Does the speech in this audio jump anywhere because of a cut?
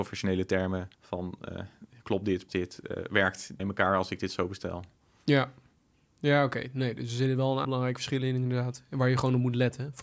yes; 4 cuts; at 0.9 s, 2.5 s, 3.6 s, 7.6 s

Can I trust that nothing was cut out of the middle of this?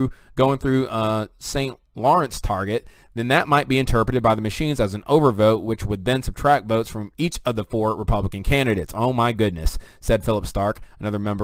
yes; 0 cuts

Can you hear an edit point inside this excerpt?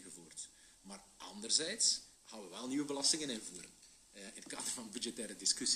yes; 1 cut; at 2.1 s

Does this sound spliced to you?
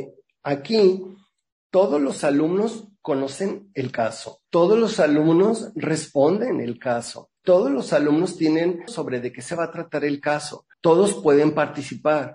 yes; 4 cuts; at 4.4 s, 7.4 s, 8.9 s, 10.7 s

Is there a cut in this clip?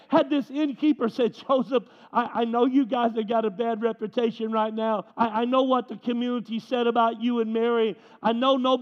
yes; 1 cut; at 5.1 s

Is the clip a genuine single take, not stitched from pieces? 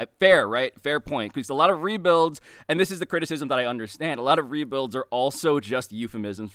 yes; 0 cuts

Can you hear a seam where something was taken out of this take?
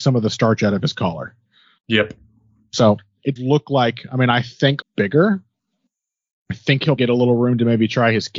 yes; 3 cuts; at 3.4 s, 4.8 s, 7.0 s

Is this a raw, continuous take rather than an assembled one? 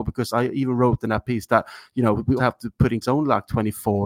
no; 2 cuts; at 2.4 s, 3.0 s

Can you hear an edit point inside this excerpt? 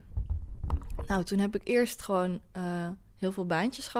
no; 0 cuts

